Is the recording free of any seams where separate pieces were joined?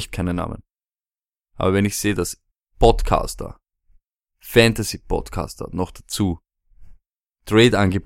no; 1 cut; at 2.5 s

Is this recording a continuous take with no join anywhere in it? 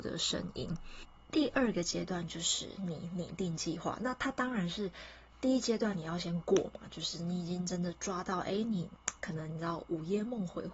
yes; 0 cuts

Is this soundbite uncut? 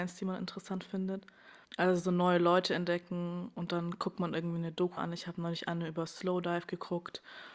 no; 2 cuts; at 1.6 s, 5.0 s

